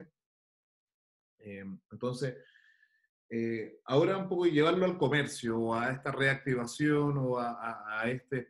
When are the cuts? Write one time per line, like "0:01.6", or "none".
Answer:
none

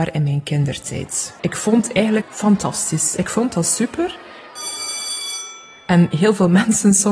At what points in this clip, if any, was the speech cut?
0:01.4
0:02.2

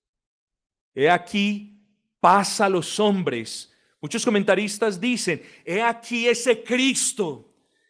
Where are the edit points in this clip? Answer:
none

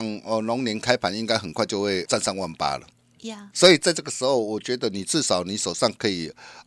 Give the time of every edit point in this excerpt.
0:02.0
0:03.5

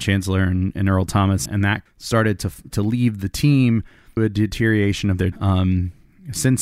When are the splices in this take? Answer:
0:01.5
0:01.9
0:02.7
0:04.2
0:05.3

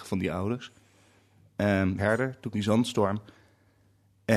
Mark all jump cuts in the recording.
0:02.0
0:02.5

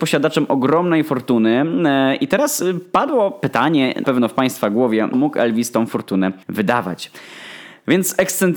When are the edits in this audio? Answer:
0:04.0
0:05.1
0:06.4

